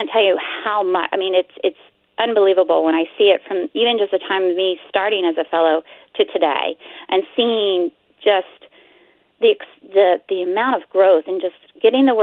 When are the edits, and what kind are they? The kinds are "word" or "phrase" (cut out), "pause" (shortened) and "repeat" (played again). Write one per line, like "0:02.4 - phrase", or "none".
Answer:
none